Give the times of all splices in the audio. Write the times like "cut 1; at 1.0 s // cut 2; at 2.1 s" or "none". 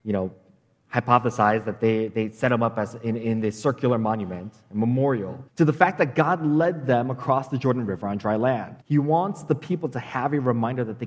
cut 1; at 5.5 s // cut 2; at 8.8 s